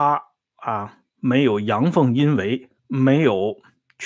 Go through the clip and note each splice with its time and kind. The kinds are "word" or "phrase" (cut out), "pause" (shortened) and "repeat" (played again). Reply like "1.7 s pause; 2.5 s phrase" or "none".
2.8 s pause